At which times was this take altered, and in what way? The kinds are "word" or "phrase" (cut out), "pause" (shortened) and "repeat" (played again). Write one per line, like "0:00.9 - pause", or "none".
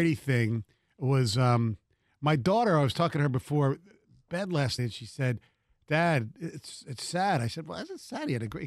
0:04.8 - word